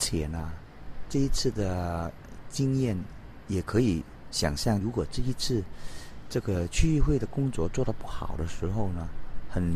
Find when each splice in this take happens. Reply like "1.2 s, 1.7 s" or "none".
4.8 s